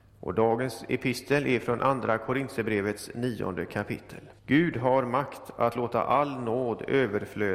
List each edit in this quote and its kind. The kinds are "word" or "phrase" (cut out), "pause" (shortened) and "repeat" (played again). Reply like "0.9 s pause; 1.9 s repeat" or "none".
4.4 s pause